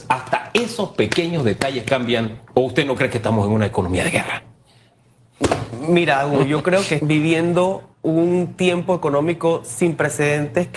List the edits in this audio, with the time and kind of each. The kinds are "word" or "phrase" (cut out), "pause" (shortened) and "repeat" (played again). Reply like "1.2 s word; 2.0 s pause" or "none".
2.5 s pause; 7.0 s word; 7.9 s pause